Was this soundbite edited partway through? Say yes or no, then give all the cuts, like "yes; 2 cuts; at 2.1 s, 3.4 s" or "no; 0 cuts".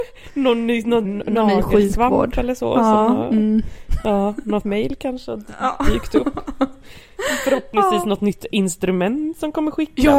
yes; 2 cuts; at 1.0 s, 4.6 s